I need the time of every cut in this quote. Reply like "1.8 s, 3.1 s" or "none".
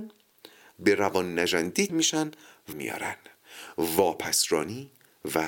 1.9 s, 2.7 s